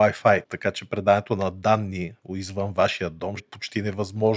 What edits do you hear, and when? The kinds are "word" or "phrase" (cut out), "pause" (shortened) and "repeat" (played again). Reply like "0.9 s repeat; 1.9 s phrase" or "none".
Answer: 3.4 s word